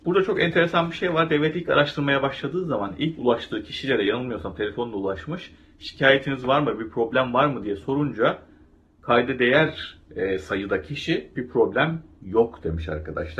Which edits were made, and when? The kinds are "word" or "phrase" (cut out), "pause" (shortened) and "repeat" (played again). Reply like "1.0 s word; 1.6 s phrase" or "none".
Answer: none